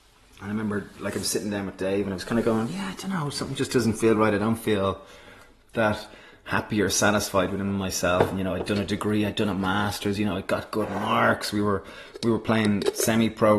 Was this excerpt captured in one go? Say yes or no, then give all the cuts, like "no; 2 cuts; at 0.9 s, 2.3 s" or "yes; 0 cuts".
yes; 0 cuts